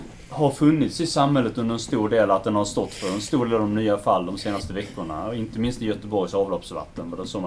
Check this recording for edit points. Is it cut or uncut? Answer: uncut